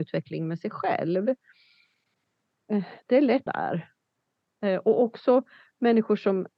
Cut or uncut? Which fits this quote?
cut